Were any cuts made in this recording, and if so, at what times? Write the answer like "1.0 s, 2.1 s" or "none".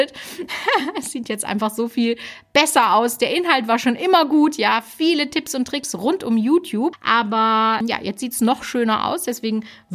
none